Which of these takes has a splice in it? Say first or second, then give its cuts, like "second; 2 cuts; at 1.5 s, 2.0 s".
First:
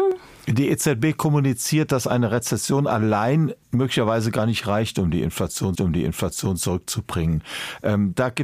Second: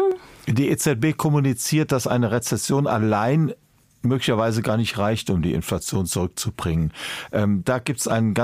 first; 2 cuts; at 3.6 s, 5.8 s